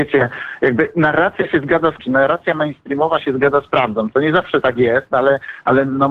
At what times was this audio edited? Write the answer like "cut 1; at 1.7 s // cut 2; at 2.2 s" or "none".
cut 1; at 2.0 s